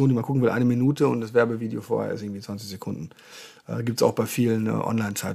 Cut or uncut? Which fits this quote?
uncut